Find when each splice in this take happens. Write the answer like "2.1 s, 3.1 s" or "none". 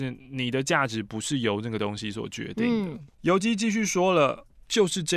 3.1 s

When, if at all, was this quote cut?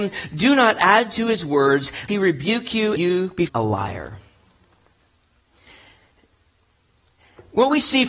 2.1 s, 3.0 s, 3.5 s

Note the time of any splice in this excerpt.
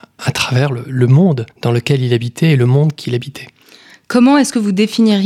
1.5 s

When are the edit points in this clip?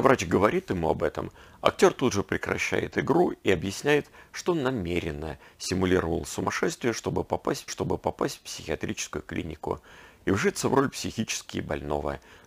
7.7 s

